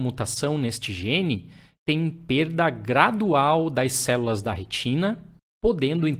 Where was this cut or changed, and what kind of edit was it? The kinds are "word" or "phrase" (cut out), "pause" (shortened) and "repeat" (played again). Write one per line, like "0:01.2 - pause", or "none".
none